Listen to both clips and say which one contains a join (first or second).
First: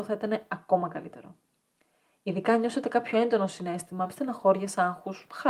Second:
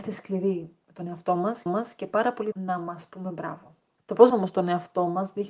second